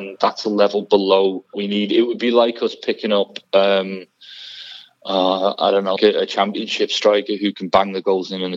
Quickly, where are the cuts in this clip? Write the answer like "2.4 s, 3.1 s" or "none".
1.5 s, 6.0 s